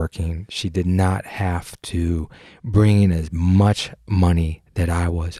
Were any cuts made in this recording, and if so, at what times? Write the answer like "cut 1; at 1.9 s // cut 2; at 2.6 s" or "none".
none